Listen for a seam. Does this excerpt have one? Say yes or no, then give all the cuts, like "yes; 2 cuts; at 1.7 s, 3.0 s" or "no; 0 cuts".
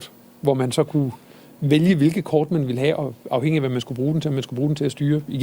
no; 0 cuts